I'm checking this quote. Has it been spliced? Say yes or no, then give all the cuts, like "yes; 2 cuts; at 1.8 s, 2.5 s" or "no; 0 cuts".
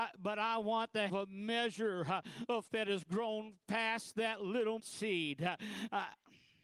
yes; 3 cuts; at 1.1 s, 2.7 s, 4.8 s